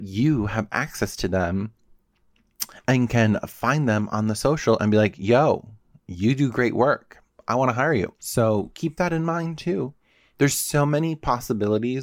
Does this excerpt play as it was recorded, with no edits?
yes; 0 cuts

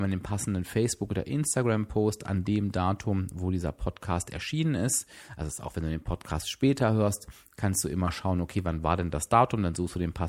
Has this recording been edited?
no; 0 cuts

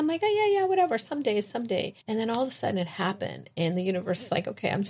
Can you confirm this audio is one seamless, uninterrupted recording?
no; 1 cut; at 2.0 s

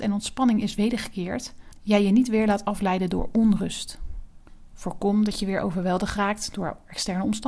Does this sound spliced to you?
no; 0 cuts

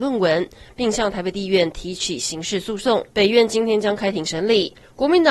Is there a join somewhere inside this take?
yes; 1 cut; at 3.1 s

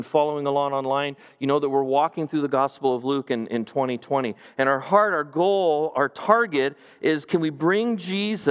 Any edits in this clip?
no; 0 cuts

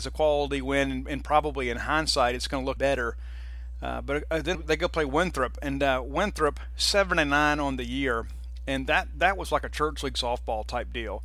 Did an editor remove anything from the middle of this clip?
yes; 3 cuts; at 2.8 s, 4.5 s, 9.4 s

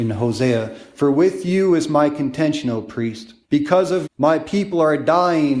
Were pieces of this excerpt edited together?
yes; 2 cuts; at 3.4 s, 4.0 s

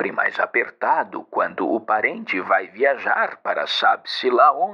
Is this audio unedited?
yes; 0 cuts

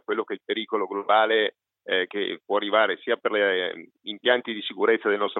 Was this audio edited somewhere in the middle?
no; 0 cuts

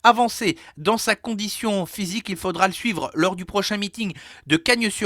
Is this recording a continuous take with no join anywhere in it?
yes; 0 cuts

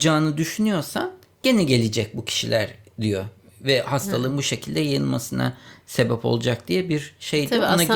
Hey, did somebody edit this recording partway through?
no; 0 cuts

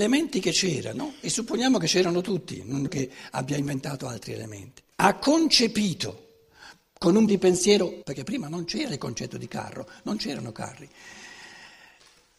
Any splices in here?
yes; 4 cuts; at 2.9 s, 4.9 s, 7.3 s, 8.0 s

